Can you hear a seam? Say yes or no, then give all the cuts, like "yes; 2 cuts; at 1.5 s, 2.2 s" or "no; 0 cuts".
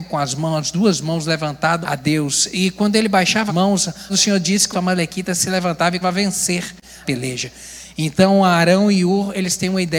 yes; 6 cuts; at 1.8 s, 3.5 s, 4.1 s, 4.7 s, 6.0 s, 7.0 s